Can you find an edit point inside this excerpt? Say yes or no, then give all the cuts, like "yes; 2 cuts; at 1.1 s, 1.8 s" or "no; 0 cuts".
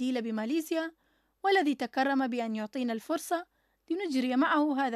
no; 0 cuts